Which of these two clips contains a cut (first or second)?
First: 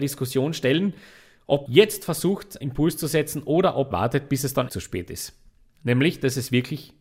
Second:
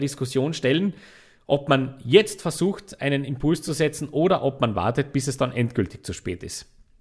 first